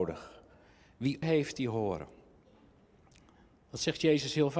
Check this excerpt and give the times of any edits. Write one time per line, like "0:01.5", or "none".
0:01.2